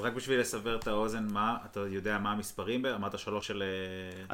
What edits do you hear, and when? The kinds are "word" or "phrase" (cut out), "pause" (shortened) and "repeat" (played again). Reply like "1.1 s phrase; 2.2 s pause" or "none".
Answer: 3.4 s word